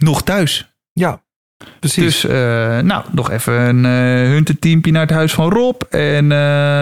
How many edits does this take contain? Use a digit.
0